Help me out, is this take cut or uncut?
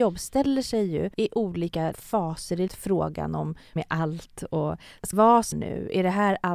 cut